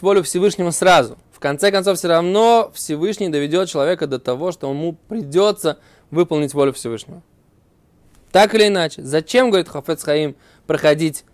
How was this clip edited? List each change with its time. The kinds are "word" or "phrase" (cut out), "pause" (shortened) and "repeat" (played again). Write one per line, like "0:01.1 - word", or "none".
none